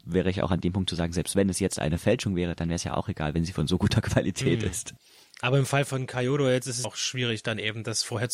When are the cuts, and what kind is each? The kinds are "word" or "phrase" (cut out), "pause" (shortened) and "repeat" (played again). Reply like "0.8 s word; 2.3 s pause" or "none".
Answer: 6.8 s word